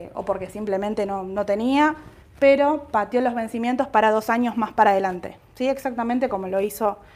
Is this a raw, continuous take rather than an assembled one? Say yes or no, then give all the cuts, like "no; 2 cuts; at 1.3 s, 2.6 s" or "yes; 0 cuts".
no; 1 cut; at 5.4 s